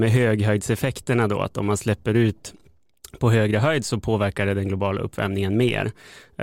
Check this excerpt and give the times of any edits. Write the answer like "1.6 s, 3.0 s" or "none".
none